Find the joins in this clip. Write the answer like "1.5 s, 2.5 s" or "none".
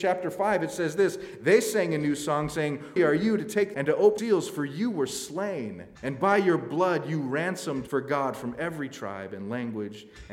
3.0 s, 3.7 s, 4.2 s, 6.0 s, 7.9 s